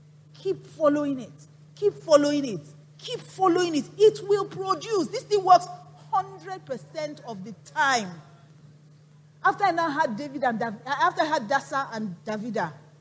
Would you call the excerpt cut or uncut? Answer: uncut